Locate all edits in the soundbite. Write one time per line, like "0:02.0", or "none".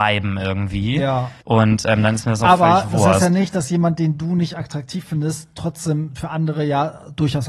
0:01.4